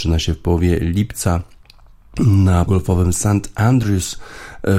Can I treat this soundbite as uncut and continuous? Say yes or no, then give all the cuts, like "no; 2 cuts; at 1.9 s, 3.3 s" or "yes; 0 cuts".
no; 1 cut; at 2.7 s